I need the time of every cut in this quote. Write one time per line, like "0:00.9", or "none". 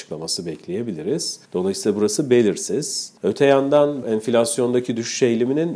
0:01.4
0:03.2
0:04.0